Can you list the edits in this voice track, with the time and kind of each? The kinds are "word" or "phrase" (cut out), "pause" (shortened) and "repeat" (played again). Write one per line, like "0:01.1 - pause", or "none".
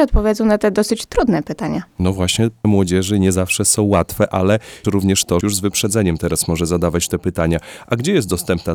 0:01.9 - pause
0:02.6 - word
0:04.8 - word
0:05.4 - phrase